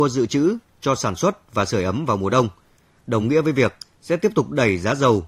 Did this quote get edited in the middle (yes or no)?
no